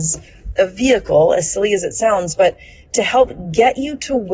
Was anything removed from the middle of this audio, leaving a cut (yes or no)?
no